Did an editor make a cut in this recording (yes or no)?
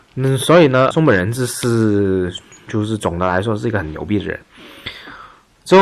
yes